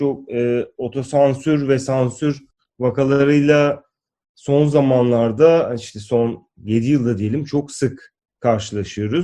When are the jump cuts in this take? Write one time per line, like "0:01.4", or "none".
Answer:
none